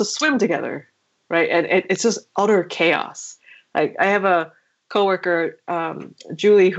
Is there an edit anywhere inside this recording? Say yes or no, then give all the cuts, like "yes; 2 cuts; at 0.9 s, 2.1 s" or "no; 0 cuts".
no; 0 cuts